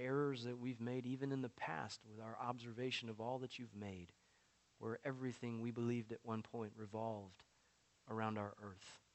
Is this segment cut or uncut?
uncut